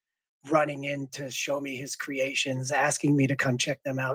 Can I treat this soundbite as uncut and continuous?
yes; 0 cuts

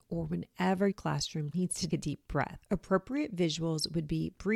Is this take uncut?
no; 3 cuts; at 0.9 s, 1.5 s, 1.9 s

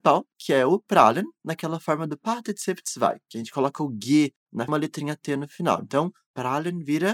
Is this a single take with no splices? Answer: no; 1 cut; at 4.7 s

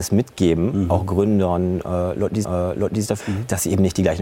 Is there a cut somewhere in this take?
yes; 2 cuts; at 2.4 s, 3.2 s

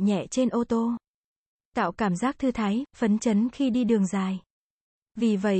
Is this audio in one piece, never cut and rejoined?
yes; 0 cuts

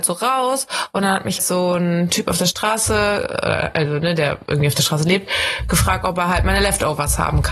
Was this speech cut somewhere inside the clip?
yes; 1 cut; at 1.4 s

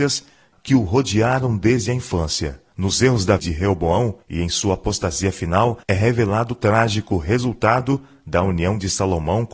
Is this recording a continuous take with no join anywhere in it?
no; 4 cuts; at 2.7 s, 3.4 s, 4.2 s, 5.8 s

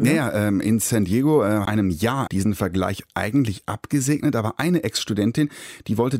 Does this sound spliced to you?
yes; 2 cuts; at 1.7 s, 2.3 s

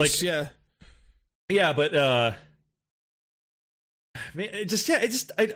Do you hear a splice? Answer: no; 0 cuts

